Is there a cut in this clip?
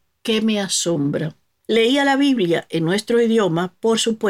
no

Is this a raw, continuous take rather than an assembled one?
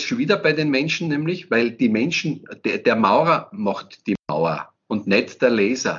no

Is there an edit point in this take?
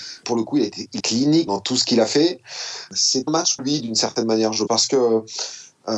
yes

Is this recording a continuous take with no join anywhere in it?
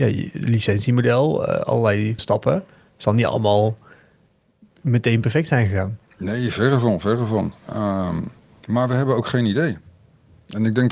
no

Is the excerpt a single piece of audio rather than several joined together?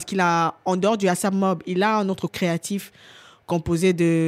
no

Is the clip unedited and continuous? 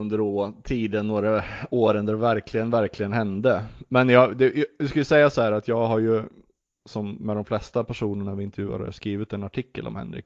yes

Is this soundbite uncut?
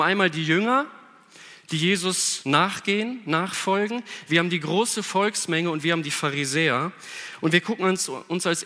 yes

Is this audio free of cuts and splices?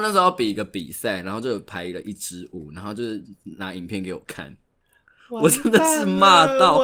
yes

